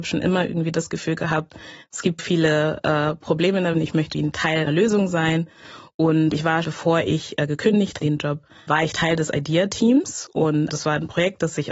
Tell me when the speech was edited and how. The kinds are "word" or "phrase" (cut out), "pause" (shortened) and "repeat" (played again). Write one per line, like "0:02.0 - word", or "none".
0:02.2 - word
0:03.7 - word
0:04.1 - word
0:04.7 - word
0:06.3 - word
0:06.6 - word
0:08.0 - word
0:08.7 - word
0:10.7 - word